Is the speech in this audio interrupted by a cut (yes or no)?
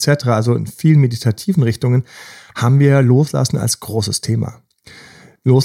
no